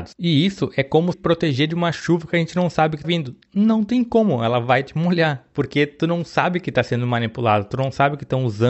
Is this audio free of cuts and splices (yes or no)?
no